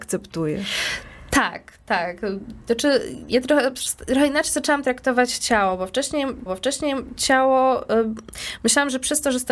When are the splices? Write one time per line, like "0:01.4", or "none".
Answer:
0:06.5